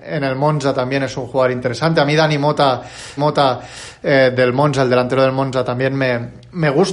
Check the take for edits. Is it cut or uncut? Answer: cut